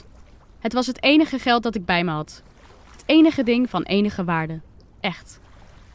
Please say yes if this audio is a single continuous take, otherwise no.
yes